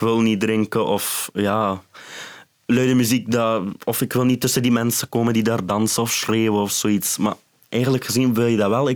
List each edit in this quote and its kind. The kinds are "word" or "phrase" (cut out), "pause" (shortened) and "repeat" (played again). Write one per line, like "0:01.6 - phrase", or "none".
none